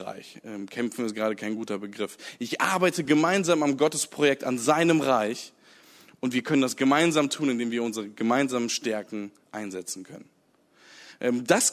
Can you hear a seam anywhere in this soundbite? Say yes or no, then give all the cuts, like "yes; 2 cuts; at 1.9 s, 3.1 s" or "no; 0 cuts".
no; 0 cuts